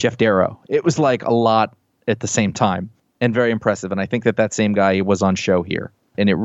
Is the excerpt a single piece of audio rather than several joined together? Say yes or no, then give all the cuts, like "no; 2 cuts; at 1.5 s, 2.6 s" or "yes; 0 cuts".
yes; 0 cuts